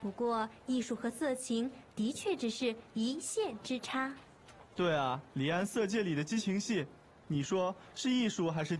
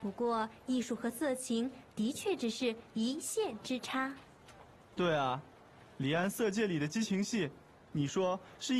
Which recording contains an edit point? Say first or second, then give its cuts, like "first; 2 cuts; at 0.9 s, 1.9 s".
first; 2 cuts; at 4.7 s, 5.3 s